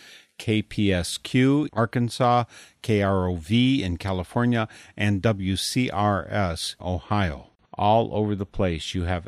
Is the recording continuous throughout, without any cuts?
no; 3 cuts; at 1.7 s, 6.8 s, 7.6 s

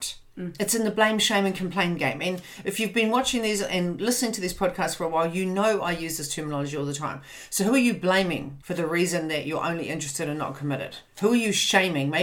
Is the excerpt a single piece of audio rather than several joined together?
no; 2 cuts; at 8.6 s, 11.1 s

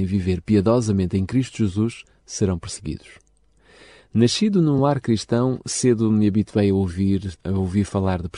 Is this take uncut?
yes; 0 cuts

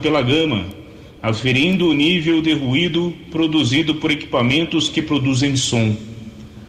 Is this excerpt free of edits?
yes; 0 cuts

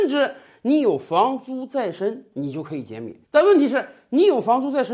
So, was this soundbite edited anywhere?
yes; 1 cut; at 3.2 s

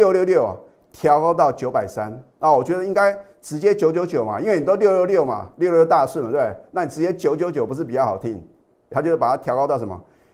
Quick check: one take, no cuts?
no; 2 cuts; at 2.3 s, 8.9 s

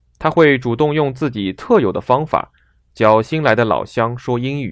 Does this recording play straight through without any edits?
yes; 0 cuts

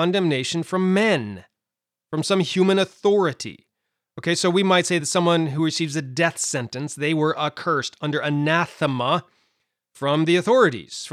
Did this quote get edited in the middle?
no; 0 cuts

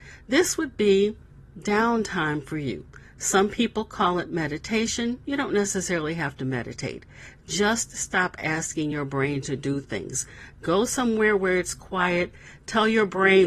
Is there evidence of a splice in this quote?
no; 0 cuts

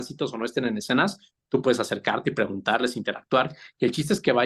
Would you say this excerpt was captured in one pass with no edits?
yes; 0 cuts

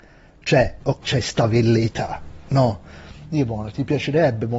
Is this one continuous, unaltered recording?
no; 1 cut; at 1.0 s

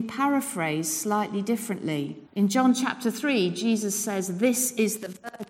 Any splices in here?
yes; 1 cut; at 2.3 s

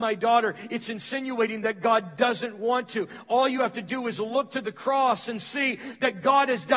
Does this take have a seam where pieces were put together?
no; 0 cuts

